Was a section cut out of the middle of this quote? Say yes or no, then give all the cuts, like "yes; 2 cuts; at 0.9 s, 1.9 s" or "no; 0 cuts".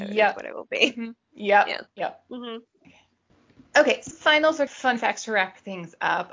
yes; 2 cuts; at 4.1 s, 4.7 s